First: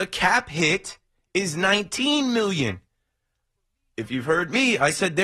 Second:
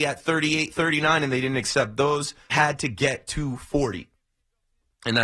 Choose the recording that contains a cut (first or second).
second